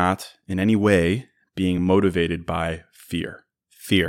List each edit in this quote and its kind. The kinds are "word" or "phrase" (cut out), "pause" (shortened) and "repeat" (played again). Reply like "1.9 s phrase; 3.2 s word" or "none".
none